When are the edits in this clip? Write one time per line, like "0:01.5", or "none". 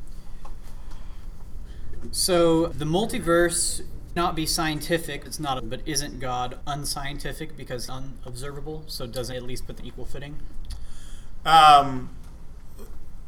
0:02.7
0:04.2
0:05.3
0:05.6
0:06.6
0:07.9
0:09.3
0:09.8